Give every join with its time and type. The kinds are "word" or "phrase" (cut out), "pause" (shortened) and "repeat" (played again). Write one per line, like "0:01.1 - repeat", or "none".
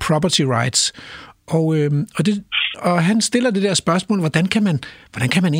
0:02.7 - word